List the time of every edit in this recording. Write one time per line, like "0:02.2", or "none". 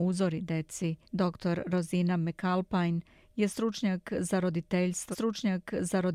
0:01.0
0:05.1